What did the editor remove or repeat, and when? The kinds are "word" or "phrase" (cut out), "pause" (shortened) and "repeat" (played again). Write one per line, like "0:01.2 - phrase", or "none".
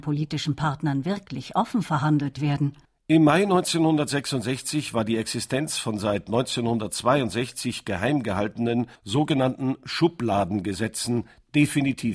0:02.8 - pause
0:09.0 - pause